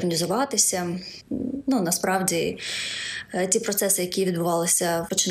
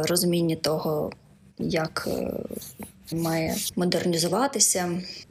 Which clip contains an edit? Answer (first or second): second